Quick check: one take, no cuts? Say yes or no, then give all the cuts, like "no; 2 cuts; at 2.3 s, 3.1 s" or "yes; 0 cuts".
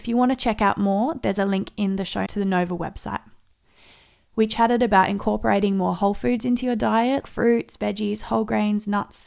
no; 2 cuts; at 2.3 s, 7.2 s